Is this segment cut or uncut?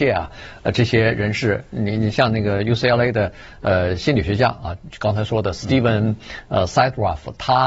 uncut